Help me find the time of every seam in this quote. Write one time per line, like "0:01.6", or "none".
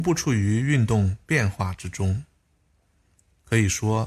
none